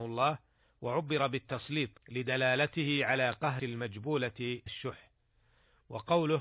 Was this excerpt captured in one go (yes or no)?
no